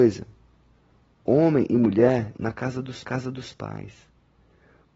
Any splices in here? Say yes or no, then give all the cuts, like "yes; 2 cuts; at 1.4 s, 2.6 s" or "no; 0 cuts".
yes; 2 cuts; at 2.3 s, 3.0 s